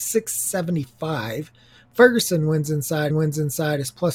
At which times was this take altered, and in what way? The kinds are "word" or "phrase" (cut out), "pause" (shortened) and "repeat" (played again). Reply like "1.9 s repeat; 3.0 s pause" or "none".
3.1 s repeat